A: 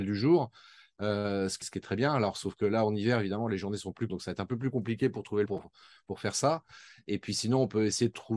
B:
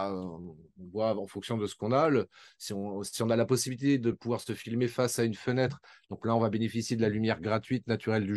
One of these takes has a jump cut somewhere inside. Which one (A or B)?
A